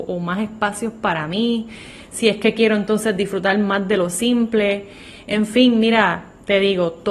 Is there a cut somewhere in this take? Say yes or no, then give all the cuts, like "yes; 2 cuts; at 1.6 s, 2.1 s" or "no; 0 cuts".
no; 0 cuts